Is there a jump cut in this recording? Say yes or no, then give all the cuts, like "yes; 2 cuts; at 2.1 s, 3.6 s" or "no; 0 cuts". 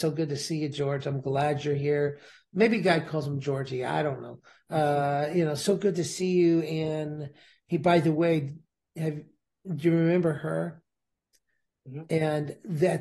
no; 0 cuts